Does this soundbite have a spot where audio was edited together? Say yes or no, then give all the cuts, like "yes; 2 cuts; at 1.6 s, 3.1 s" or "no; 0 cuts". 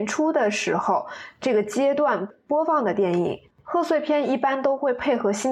yes; 1 cut; at 3.5 s